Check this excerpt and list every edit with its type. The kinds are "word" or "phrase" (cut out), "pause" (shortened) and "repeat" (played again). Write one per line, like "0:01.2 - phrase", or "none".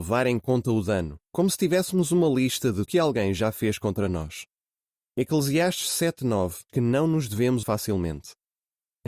0:01.2 - pause
0:02.9 - phrase
0:06.7 - word
0:07.6 - word